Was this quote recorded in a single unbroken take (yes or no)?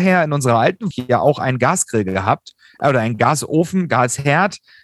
no